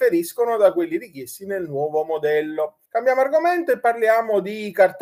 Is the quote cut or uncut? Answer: cut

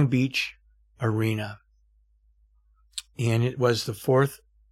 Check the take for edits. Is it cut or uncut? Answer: uncut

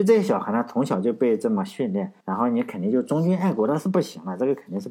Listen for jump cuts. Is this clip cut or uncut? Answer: cut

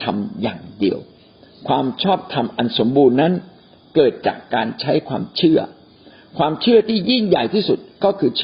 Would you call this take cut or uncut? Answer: uncut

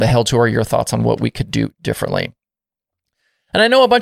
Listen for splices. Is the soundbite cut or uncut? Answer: uncut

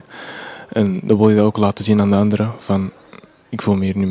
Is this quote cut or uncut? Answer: uncut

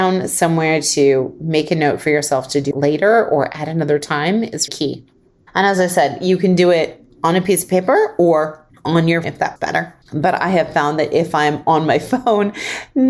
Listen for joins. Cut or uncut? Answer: cut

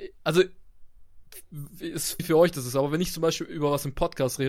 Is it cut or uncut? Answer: cut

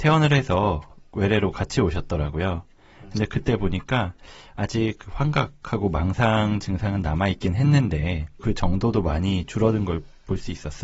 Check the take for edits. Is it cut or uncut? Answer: cut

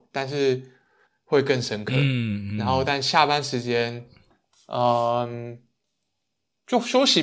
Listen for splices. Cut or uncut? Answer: cut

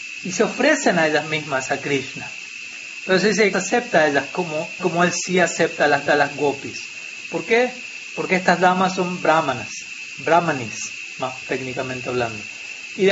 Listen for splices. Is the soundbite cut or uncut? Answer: cut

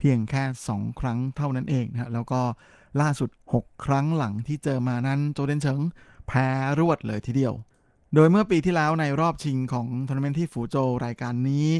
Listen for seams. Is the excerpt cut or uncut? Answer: uncut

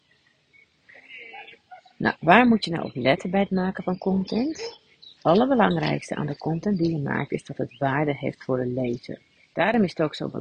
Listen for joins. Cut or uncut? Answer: uncut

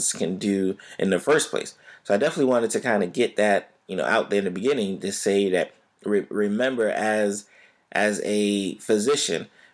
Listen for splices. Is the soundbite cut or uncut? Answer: uncut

